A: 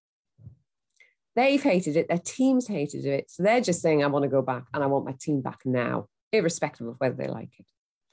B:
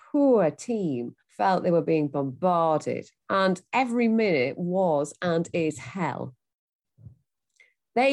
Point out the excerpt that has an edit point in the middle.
B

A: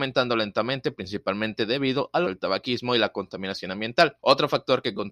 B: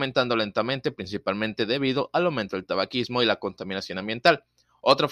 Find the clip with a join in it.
A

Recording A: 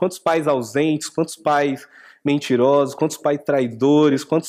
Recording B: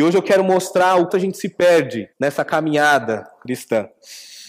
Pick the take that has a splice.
B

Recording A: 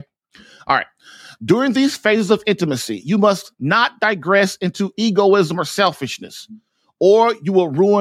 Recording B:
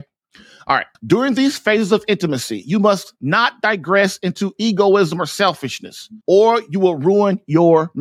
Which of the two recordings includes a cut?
B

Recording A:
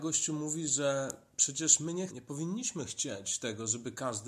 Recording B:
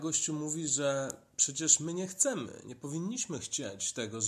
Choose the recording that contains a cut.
A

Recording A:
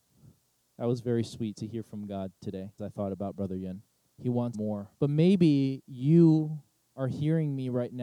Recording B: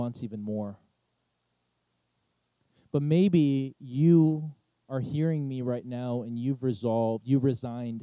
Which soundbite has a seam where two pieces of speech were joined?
A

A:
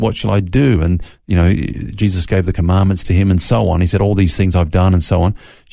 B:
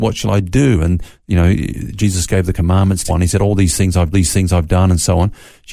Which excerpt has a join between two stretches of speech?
B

